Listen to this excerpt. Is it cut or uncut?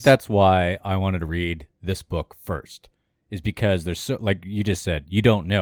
uncut